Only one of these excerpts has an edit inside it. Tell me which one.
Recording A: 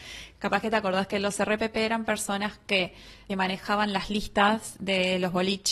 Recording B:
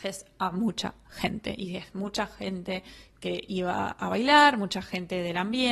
A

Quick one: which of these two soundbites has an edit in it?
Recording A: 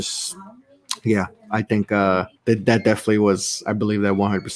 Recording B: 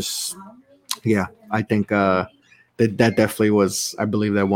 A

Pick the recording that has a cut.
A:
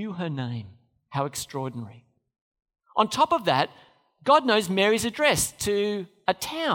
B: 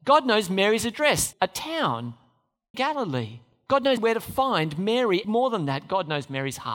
B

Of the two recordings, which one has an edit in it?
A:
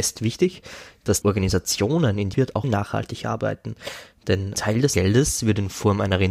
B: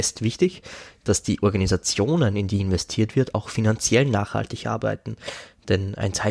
A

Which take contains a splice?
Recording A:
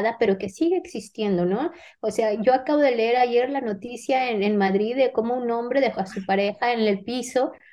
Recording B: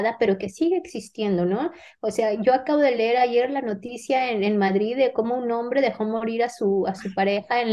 A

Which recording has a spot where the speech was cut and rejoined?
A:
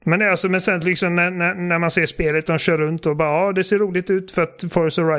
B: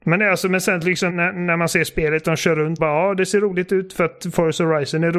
B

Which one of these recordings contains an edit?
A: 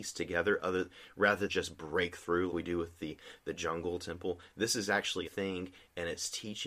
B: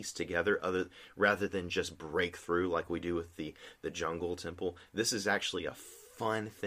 A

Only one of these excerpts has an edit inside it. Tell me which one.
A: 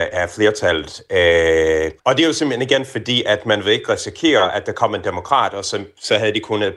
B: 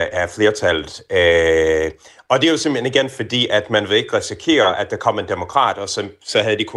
A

